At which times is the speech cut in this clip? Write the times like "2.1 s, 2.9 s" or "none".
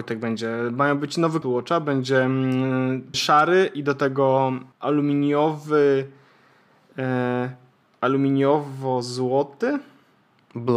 1.4 s, 3.1 s, 4.7 s, 7.8 s